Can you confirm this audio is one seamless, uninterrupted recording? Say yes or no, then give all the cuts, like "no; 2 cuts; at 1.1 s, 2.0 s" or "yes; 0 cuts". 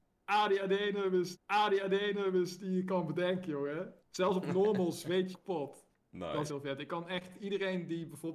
no; 5 cuts; at 1.3 s, 4.0 s, 5.3 s, 6.0 s, 6.5 s